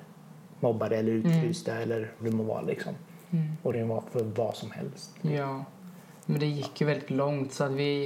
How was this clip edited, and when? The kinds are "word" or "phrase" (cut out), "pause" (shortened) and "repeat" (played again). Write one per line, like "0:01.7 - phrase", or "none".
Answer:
0:02.2 - word
0:03.7 - phrase